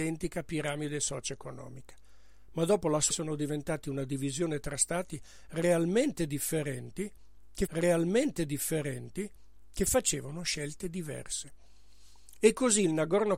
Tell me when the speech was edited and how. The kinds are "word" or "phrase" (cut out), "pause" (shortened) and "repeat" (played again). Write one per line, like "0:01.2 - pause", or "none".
0:03.1 - word
0:07.7 - repeat